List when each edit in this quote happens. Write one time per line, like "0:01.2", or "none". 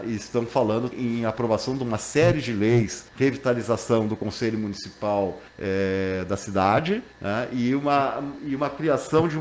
0:00.9
0:03.1
0:05.5
0:07.1